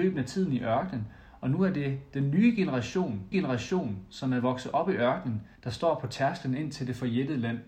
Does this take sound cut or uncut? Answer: cut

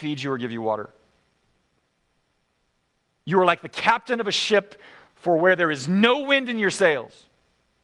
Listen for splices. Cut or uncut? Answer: uncut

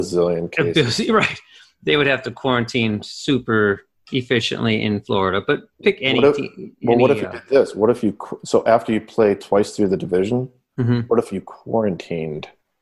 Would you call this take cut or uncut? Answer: uncut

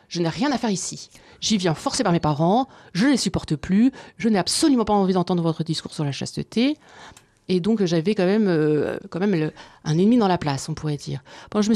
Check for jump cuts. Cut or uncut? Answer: uncut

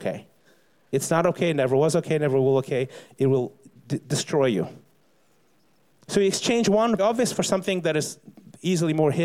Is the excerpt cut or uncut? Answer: cut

